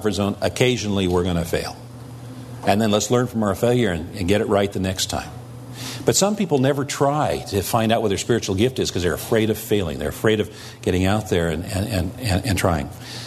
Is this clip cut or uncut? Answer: uncut